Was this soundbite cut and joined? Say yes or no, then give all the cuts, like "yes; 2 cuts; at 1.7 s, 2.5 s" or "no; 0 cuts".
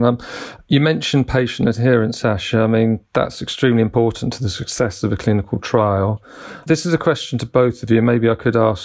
no; 0 cuts